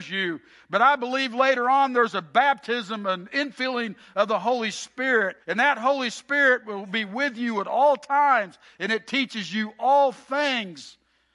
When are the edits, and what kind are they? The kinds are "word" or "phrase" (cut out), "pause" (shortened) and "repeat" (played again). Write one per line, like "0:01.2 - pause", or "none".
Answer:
0:05.4 - pause